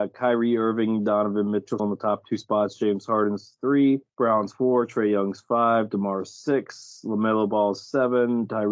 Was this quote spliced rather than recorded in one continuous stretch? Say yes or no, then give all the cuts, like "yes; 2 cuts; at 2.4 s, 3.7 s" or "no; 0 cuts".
yes; 2 cuts; at 1.8 s, 4.1 s